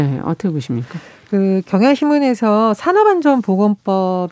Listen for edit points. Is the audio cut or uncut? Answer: uncut